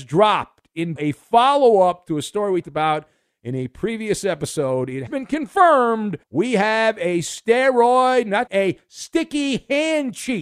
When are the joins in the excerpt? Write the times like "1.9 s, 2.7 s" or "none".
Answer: 1.0 s, 2.6 s, 5.1 s, 6.2 s, 8.5 s